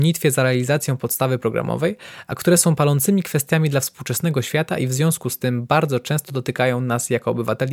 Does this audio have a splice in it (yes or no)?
no